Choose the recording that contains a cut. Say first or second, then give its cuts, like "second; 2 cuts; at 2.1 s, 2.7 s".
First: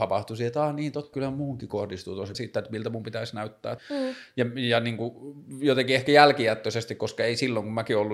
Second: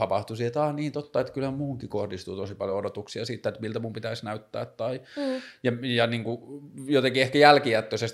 first; 3 cuts; at 1.1 s, 2.3 s, 3.8 s